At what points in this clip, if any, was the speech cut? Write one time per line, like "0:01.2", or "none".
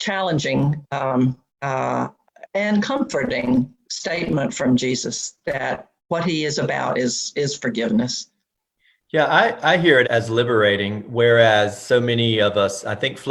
0:01.5
0:06.0
0:10.0